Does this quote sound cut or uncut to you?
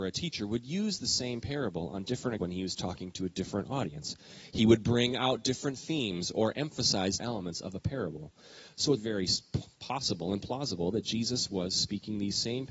cut